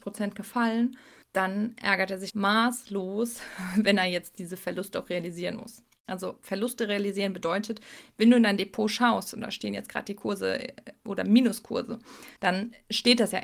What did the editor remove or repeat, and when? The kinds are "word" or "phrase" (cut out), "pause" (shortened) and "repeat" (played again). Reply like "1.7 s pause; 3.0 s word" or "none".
1.2 s pause; 2.3 s word; 12.4 s pause